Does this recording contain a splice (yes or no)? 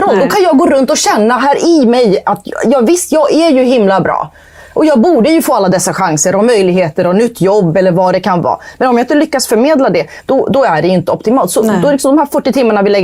no